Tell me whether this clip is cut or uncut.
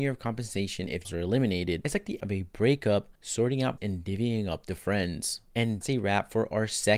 cut